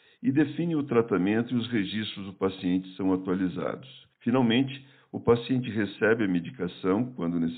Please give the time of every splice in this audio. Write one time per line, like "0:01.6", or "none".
0:04.1